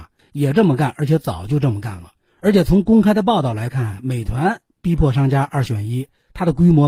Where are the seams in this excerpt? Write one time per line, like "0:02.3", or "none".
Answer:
none